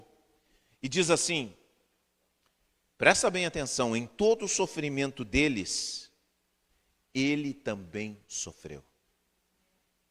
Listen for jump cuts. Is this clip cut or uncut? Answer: uncut